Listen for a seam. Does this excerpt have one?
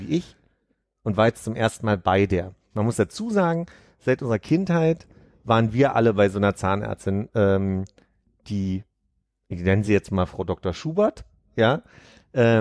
no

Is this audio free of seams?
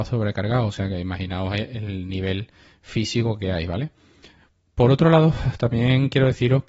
yes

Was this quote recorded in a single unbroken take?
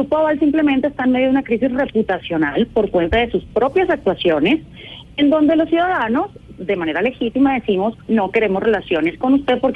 no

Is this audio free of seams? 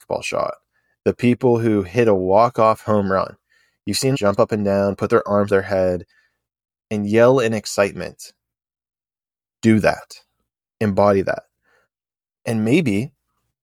no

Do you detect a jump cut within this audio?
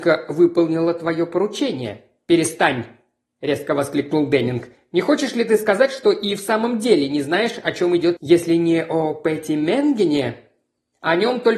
yes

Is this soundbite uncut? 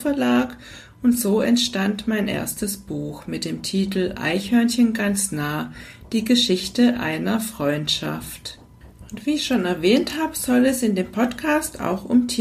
yes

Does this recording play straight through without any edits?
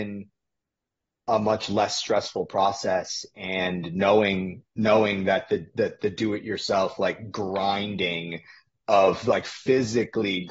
yes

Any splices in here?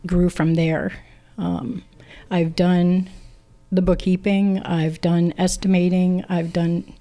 no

